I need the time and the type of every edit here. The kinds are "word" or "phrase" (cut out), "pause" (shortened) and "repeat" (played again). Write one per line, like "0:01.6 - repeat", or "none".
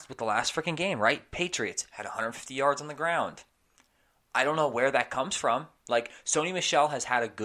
none